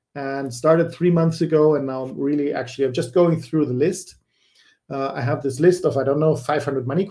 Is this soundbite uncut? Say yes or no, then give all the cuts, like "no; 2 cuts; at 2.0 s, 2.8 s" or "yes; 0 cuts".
yes; 0 cuts